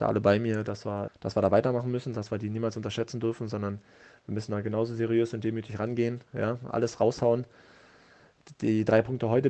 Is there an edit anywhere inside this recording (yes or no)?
yes